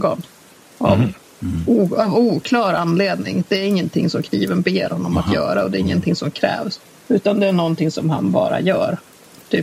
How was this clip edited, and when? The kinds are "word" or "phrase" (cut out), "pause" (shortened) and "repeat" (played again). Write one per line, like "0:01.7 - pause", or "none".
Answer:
0:06.8 - pause